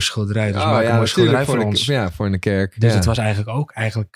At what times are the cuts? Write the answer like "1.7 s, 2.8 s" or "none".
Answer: none